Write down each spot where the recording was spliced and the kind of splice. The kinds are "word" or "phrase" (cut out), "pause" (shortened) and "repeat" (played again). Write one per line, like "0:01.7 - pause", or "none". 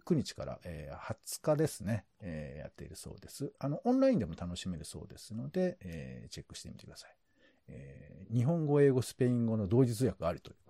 none